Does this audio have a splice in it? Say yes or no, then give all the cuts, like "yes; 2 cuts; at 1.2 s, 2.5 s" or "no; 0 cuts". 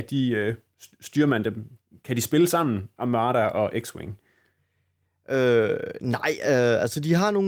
no; 0 cuts